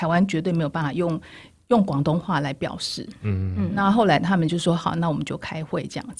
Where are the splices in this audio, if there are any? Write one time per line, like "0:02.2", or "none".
none